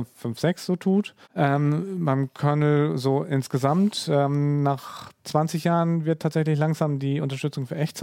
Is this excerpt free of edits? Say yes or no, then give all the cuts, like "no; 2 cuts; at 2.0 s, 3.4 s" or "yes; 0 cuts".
no; 1 cut; at 1.2 s